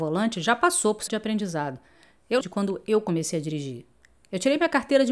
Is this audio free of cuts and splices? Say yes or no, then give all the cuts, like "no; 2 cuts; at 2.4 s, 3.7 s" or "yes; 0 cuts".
no; 2 cuts; at 1.1 s, 2.4 s